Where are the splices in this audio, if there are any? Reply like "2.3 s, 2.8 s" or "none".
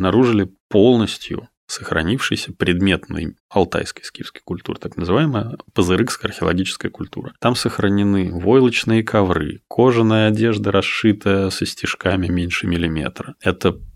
3.4 s, 11.5 s